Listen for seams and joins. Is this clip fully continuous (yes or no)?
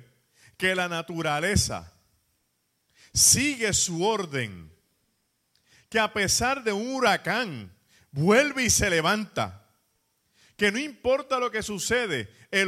yes